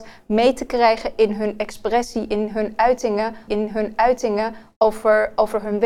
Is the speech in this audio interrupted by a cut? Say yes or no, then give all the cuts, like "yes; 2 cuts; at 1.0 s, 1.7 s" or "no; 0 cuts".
yes; 1 cut; at 3.5 s